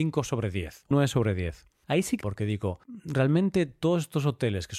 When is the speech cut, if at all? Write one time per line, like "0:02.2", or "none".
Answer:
0:00.9
0:02.2
0:02.8